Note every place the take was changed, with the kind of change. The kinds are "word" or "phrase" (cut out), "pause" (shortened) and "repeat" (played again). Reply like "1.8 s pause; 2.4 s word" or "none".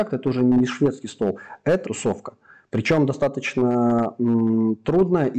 1.9 s word

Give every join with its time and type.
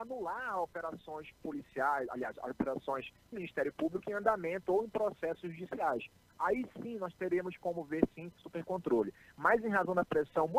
3.3 s word; 8.4 s word

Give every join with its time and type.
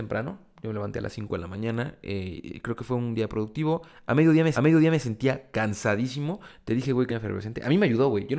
4.5 s repeat; 7.1 s phrase

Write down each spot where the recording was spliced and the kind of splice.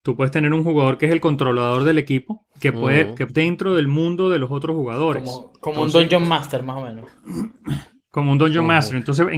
2.6 s pause; 3.3 s phrase

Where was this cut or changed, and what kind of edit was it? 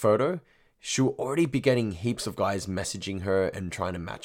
none

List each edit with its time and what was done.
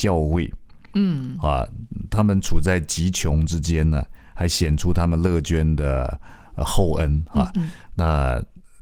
none

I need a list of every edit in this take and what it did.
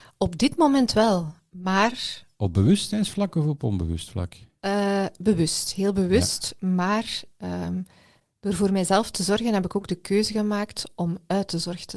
none

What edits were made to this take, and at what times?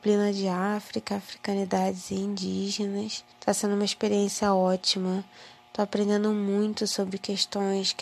3.3 s pause

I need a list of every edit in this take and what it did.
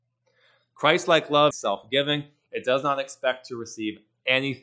1.5 s phrase

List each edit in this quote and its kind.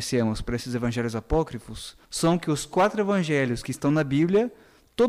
2.0 s pause

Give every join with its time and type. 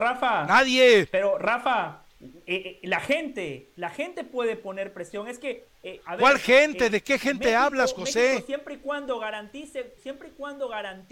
2.1 s pause; 10.0 s pause

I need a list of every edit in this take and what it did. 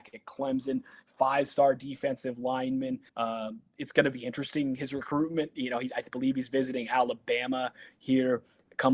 3.1 s pause

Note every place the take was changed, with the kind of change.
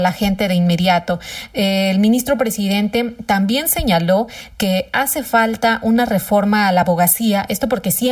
none

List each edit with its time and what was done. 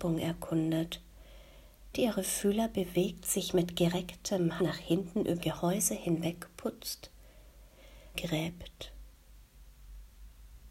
1.9 s word; 4.6 s word; 5.4 s word; 8.1 s phrase

